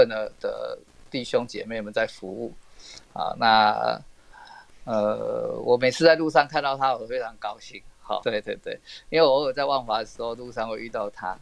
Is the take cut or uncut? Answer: cut